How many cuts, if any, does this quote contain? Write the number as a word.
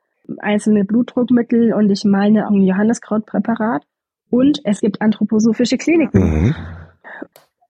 two